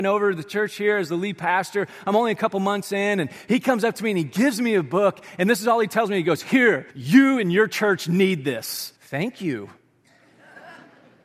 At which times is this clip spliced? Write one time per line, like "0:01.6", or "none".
0:06.9
0:09.0